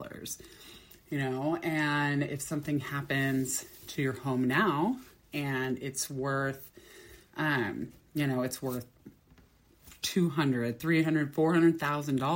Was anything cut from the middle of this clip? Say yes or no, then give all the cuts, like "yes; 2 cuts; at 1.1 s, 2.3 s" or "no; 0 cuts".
no; 0 cuts